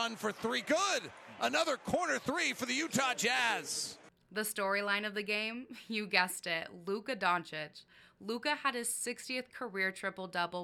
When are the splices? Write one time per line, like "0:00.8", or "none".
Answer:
none

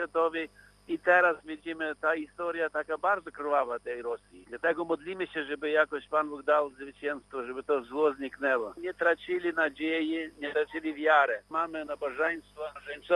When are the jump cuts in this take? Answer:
none

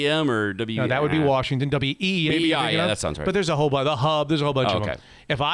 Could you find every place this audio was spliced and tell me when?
0:02.3

